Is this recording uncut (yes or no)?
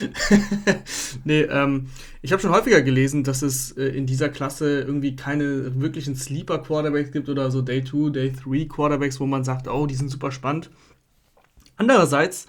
yes